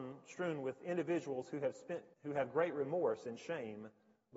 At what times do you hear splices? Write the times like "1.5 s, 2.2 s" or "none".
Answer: 2.1 s

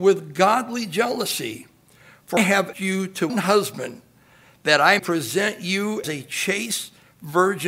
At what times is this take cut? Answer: 2.4 s, 2.7 s, 3.3 s, 5.0 s, 6.0 s

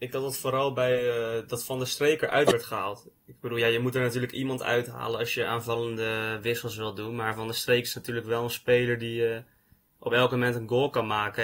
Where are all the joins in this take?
none

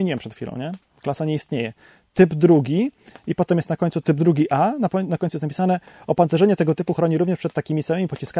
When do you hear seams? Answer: 4.0 s

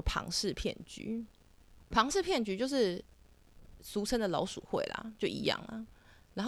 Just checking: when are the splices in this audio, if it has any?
1.9 s

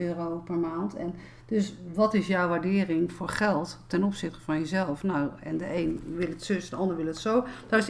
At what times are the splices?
none

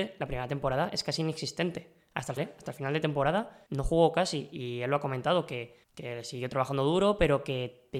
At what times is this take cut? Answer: 2.4 s, 3.7 s, 5.8 s

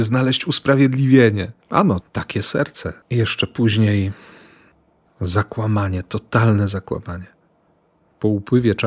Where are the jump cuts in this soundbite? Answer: 1.6 s, 2.0 s, 3.0 s

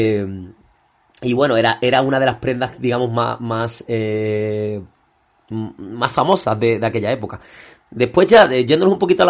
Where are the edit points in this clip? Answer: none

